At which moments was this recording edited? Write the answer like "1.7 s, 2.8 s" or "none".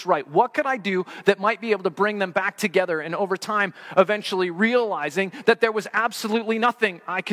none